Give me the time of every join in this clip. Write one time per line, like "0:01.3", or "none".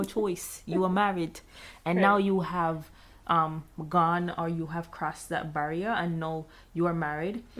none